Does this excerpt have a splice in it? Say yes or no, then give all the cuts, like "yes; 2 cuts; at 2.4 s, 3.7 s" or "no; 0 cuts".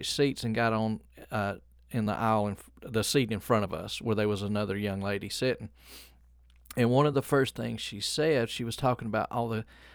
no; 0 cuts